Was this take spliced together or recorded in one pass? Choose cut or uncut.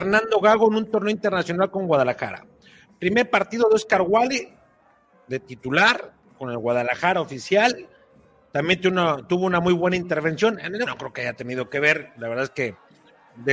cut